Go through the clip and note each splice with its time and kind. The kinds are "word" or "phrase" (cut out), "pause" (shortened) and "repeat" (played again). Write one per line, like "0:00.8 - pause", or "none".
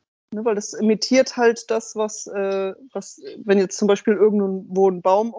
none